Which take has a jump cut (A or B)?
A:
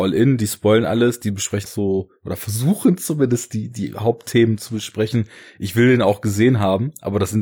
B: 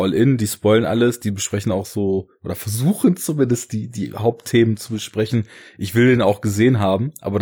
A